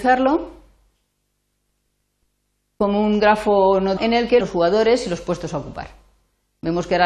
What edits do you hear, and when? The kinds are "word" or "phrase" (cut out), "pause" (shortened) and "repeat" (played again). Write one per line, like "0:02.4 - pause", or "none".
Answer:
0:04.0 - word
0:04.4 - phrase